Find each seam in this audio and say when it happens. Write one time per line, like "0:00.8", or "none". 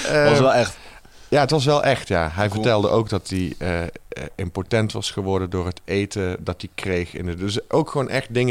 none